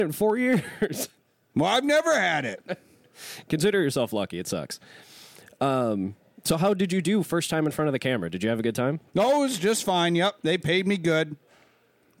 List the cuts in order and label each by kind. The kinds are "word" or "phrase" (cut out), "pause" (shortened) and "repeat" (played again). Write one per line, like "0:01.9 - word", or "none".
0:09.1 - pause